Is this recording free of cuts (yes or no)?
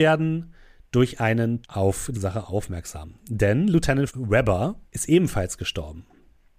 no